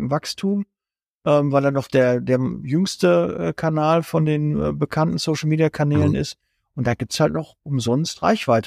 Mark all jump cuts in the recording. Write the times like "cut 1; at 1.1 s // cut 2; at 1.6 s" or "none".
none